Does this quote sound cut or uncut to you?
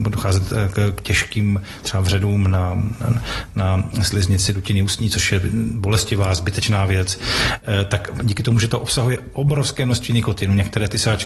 uncut